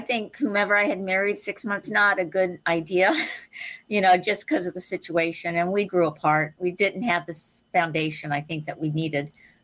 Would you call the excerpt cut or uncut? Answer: cut